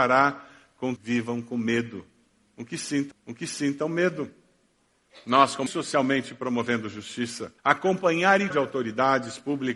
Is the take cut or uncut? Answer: cut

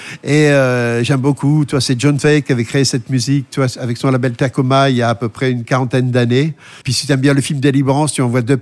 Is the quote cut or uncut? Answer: cut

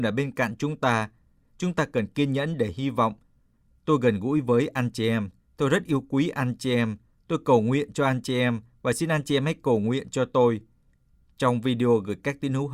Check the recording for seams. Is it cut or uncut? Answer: uncut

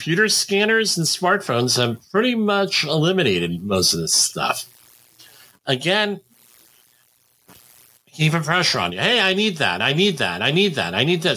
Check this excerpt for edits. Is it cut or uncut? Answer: uncut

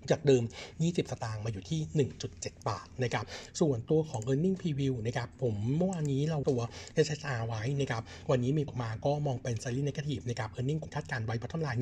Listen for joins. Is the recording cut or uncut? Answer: cut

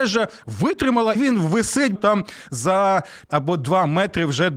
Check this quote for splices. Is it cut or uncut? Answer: cut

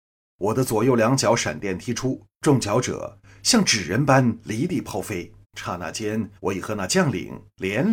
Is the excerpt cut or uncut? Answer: cut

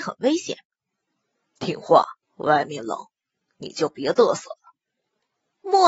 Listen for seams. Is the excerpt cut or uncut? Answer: cut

